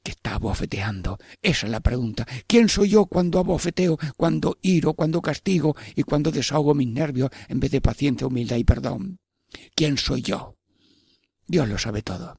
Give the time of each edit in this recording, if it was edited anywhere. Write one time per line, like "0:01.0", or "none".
none